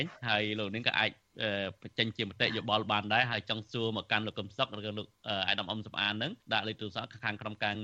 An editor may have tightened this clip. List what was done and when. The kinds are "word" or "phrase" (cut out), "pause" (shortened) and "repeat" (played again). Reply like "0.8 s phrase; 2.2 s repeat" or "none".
6.4 s pause

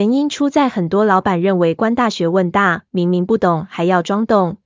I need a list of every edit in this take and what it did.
2.9 s pause

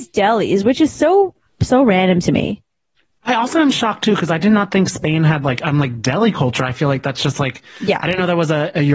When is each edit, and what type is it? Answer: none

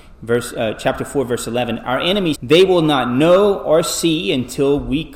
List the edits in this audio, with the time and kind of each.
2.3 s word

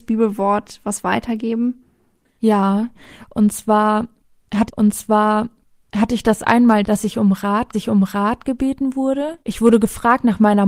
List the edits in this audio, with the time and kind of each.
4.7 s repeat; 7.7 s repeat; 9.4 s pause

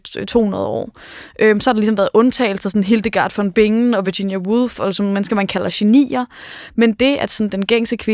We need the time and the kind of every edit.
none

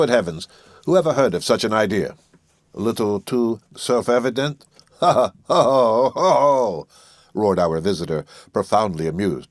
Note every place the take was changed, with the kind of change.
none

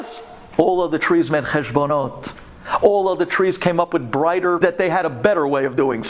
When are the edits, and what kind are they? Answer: 4.6 s phrase

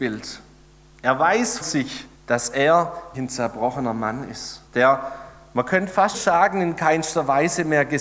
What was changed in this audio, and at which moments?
1.6 s word; 2.1 s pause; 3.1 s word; 4.7 s pause; 6.1 s word

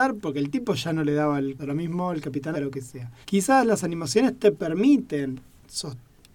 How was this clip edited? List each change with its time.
1.6 s phrase; 2.5 s word; 3.2 s pause

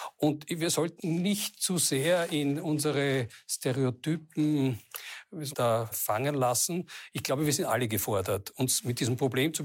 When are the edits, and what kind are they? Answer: 1.0 s word; 5.5 s phrase; 5.9 s word

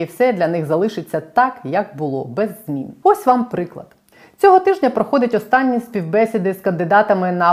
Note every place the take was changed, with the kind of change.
none

